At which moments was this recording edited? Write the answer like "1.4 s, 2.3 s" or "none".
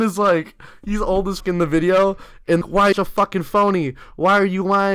1.4 s, 2.6 s, 2.9 s